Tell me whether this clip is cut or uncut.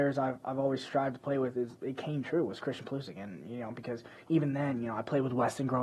uncut